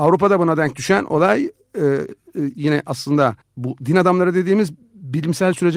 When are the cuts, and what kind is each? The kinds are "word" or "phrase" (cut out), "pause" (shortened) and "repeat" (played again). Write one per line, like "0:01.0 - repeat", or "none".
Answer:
0:03.4 - pause